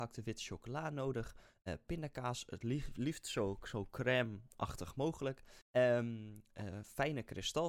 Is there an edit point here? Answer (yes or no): yes